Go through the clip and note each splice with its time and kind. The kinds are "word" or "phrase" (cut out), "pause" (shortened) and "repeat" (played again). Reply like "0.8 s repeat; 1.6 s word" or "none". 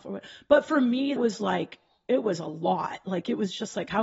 1.2 s word